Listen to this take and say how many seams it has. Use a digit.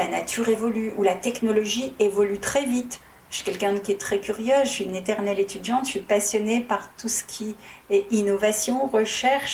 0